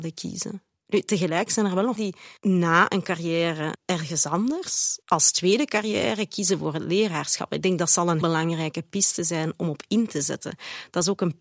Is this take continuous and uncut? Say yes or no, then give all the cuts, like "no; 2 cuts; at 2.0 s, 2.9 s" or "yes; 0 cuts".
no; 4 cuts; at 2.0 s, 2.4 s, 5.0 s, 8.2 s